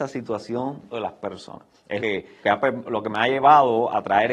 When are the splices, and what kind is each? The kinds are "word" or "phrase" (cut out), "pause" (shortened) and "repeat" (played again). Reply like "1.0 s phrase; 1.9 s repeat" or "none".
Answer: 0.9 s word; 2.0 s word; 2.4 s word; 2.8 s word